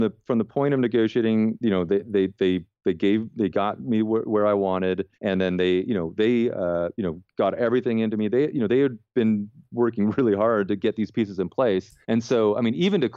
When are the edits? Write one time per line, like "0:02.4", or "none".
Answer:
0:05.1
0:12.0